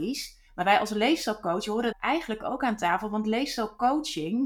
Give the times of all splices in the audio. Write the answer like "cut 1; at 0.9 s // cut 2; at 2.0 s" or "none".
cut 1; at 1.9 s